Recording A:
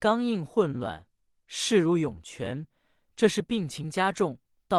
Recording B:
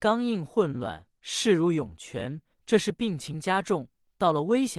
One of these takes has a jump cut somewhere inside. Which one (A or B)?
B